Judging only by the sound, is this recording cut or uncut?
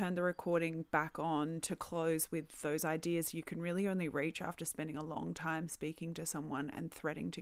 uncut